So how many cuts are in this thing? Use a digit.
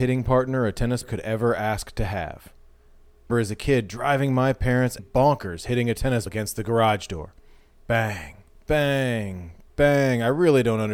5